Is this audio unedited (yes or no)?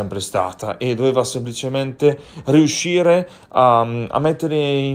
yes